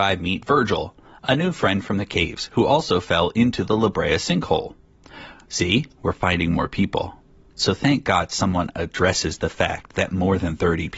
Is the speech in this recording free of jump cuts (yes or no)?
yes